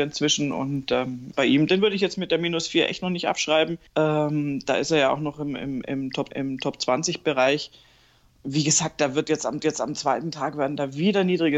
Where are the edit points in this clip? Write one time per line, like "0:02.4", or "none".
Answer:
0:01.3
0:03.9
0:06.3
0:09.6